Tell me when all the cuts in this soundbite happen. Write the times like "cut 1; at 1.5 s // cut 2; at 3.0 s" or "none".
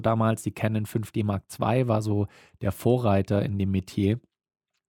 none